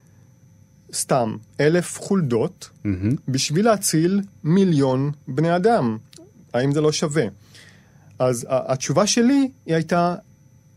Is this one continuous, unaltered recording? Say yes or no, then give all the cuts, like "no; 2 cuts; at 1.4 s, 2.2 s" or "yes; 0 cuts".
yes; 0 cuts